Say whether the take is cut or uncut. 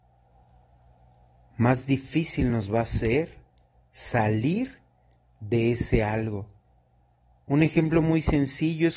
uncut